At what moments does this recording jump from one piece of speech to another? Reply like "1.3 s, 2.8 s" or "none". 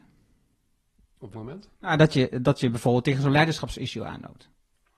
1.3 s